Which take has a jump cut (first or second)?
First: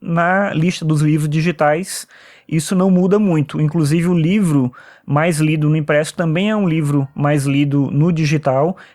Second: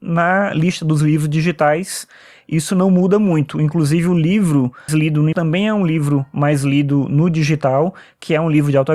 second